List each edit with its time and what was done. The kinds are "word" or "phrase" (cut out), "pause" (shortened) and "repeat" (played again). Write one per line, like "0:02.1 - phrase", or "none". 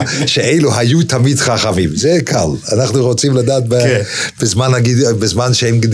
none